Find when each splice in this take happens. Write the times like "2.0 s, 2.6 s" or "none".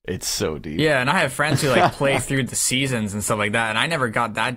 none